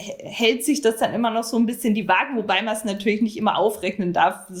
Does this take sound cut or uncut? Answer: uncut